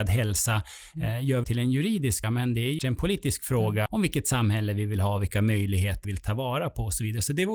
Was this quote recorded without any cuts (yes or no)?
no